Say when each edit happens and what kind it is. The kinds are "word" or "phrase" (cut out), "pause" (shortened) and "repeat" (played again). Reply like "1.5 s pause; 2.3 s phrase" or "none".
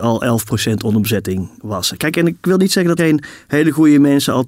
3.0 s word